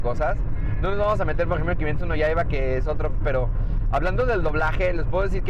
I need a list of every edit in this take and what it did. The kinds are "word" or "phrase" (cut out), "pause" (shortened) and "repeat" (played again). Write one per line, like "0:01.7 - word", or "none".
0:03.2 - word